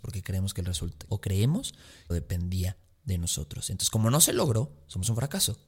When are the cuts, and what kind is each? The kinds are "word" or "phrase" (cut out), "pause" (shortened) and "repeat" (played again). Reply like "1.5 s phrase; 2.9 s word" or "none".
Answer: 1.1 s word; 2.1 s phrase